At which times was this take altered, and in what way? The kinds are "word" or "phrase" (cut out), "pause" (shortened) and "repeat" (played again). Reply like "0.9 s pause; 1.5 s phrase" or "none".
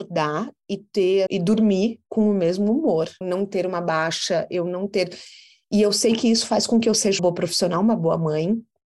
1.3 s word; 3.2 s word; 7.2 s word